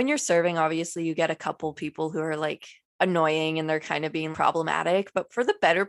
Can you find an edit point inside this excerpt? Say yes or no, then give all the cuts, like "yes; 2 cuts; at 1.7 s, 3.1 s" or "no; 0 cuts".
yes; 2 cuts; at 2.8 s, 4.3 s